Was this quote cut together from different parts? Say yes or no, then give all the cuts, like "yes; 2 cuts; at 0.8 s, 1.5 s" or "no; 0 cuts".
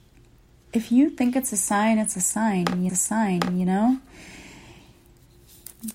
yes; 1 cut; at 2.9 s